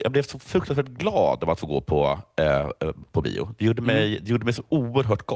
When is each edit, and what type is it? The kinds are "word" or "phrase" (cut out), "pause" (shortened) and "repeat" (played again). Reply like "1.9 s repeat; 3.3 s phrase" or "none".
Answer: none

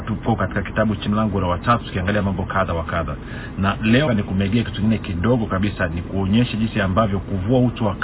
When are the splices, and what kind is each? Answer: 1.1 s word; 4.1 s word

